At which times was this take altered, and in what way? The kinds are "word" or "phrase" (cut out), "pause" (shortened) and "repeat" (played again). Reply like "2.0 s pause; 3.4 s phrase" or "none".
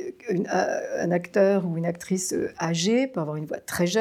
none